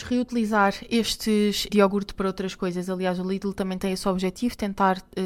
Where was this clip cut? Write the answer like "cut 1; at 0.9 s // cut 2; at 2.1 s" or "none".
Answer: cut 1; at 1.7 s